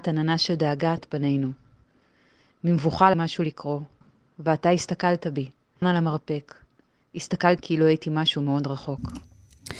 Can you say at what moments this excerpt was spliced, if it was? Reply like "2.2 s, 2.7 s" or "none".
1.0 s, 3.1 s, 5.8 s, 7.6 s